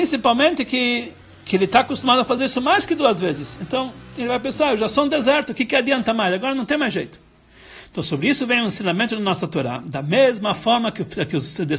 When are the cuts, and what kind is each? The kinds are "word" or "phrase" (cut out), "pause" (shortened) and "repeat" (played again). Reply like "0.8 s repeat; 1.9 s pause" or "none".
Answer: none

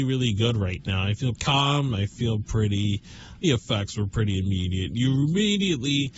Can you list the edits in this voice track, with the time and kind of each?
1.3 s word; 3.4 s phrase

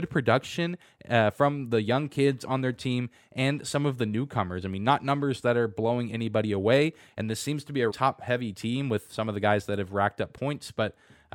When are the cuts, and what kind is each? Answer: 7.9 s word

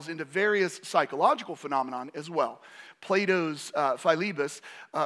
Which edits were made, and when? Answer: none

